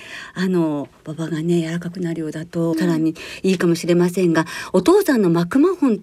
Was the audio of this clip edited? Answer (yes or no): yes